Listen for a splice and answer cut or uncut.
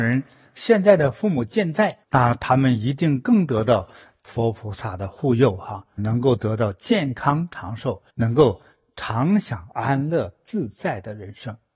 cut